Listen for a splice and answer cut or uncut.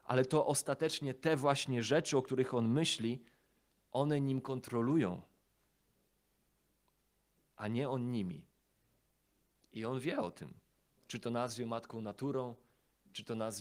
uncut